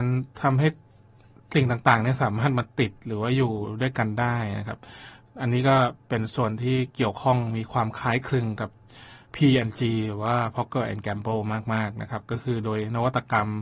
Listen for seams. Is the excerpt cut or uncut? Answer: uncut